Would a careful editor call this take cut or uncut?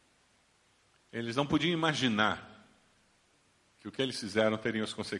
uncut